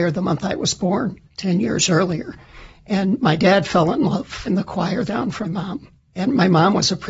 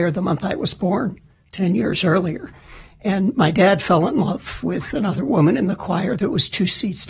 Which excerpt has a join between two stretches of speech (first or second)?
first